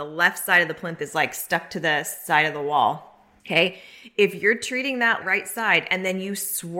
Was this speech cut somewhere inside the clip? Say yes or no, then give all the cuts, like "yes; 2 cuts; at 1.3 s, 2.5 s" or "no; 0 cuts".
no; 0 cuts